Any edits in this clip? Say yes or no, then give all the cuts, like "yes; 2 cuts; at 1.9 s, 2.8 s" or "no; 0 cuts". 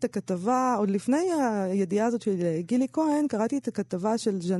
no; 0 cuts